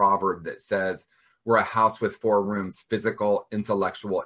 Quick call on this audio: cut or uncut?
uncut